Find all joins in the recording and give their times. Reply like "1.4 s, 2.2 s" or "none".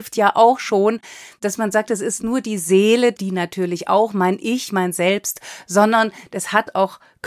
2.2 s, 3.1 s